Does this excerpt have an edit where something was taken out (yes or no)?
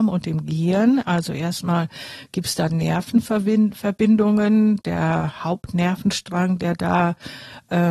no